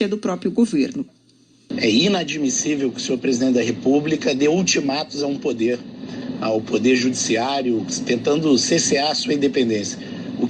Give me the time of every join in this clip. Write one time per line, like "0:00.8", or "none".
none